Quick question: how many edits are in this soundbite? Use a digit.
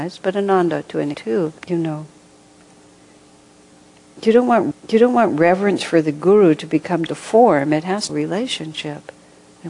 5